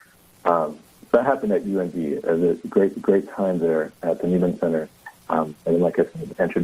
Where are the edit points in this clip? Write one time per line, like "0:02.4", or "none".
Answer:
0:02.9
0:05.2